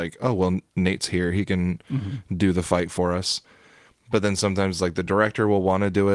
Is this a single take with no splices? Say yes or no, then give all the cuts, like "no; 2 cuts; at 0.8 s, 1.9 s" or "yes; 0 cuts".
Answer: yes; 0 cuts